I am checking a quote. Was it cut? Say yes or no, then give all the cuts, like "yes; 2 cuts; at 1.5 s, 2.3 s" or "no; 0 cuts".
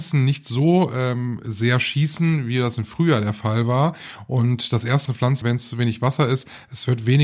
yes; 2 cuts; at 5.1 s, 5.4 s